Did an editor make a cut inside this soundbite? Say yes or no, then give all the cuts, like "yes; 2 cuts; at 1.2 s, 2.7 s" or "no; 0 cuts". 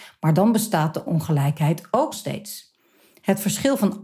yes; 2 cuts; at 1.1 s, 2.1 s